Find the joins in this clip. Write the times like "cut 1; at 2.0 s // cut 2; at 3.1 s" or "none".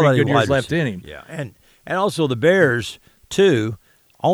none